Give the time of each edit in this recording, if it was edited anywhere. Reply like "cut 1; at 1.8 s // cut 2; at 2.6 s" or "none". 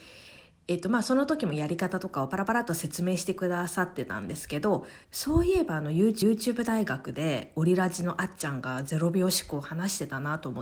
cut 1; at 5.0 s // cut 2; at 6.2 s